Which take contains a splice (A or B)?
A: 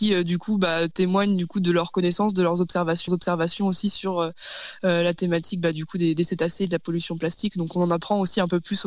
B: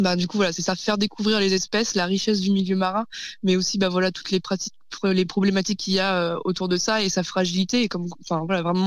A